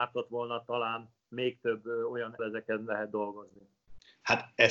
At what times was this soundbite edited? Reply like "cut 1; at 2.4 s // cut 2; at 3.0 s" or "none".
cut 1; at 1.2 s // cut 2; at 2.4 s